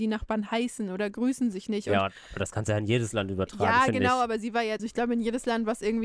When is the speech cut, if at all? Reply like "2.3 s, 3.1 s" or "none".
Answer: 4.8 s